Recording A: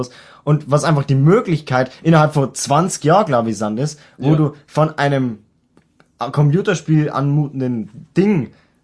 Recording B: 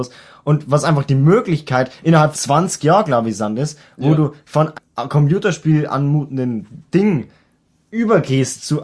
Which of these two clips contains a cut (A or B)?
B